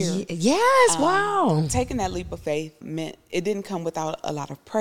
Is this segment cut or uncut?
cut